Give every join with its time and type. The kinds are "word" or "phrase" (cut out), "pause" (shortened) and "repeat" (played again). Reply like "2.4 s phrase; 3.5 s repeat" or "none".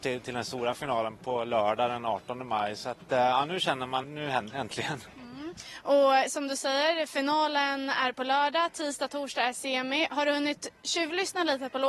4.0 s word; 4.5 s word